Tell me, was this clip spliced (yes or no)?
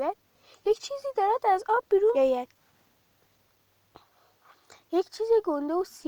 yes